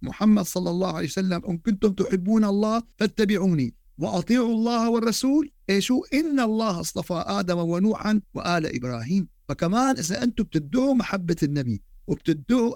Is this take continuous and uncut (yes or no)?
no